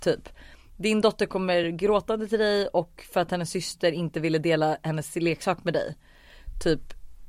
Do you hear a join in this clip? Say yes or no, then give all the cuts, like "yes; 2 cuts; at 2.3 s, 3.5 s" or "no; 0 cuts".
no; 0 cuts